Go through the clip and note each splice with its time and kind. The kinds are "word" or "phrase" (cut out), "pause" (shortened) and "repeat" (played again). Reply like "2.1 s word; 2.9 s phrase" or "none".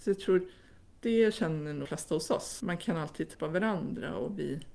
1.8 s word; 2.6 s word; 3.3 s word